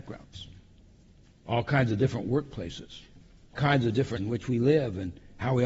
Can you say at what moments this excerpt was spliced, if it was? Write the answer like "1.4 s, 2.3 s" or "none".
3.5 s, 4.2 s